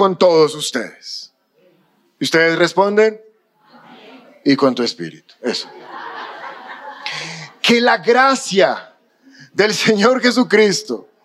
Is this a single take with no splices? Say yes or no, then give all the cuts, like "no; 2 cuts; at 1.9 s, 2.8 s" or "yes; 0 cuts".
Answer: yes; 0 cuts